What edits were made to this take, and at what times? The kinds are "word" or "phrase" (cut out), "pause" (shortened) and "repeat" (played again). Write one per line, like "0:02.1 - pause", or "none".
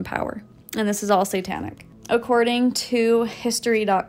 none